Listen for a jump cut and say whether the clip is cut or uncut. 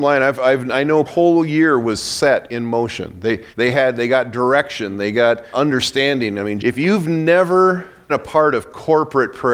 cut